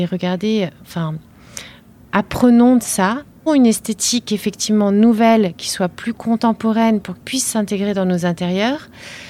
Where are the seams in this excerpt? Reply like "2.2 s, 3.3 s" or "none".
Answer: 3.5 s, 7.2 s